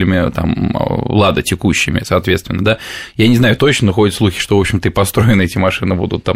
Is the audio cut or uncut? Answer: cut